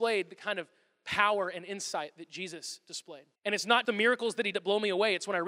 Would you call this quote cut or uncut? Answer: cut